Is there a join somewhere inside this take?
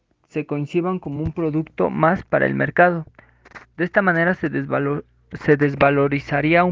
no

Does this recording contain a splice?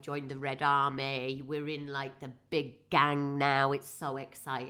no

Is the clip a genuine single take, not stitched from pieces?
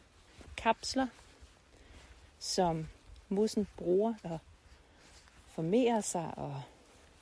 no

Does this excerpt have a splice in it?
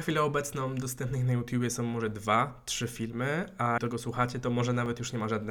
yes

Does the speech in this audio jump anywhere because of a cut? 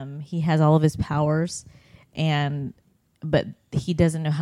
no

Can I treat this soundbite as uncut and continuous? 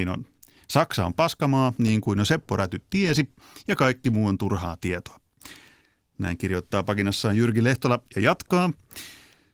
yes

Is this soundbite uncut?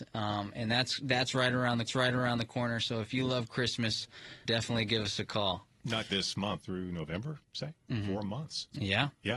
no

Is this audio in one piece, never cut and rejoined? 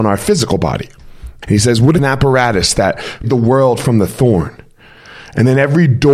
no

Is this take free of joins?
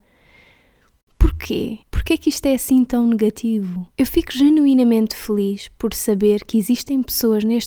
no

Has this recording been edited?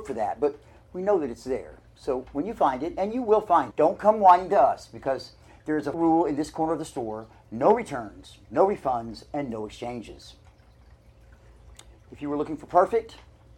yes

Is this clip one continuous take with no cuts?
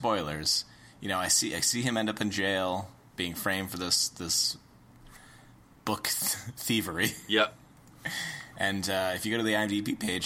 yes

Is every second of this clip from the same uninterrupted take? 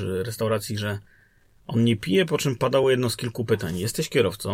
yes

